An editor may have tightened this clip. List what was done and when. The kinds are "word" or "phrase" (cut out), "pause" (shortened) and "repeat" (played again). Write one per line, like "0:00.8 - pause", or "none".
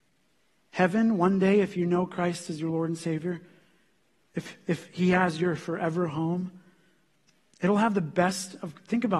none

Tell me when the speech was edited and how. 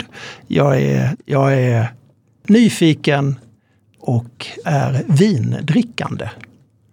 0:01.1 - word
0:04.6 - word

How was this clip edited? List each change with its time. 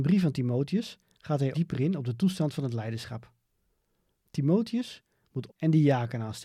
0:01.5 - word
0:05.5 - word

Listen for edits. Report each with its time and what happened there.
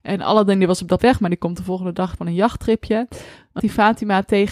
0:01.0 - word
0:02.2 - word
0:03.6 - phrase

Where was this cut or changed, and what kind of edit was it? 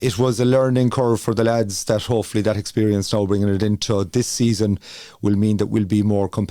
none

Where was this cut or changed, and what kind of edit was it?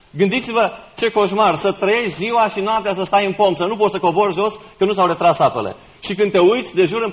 none

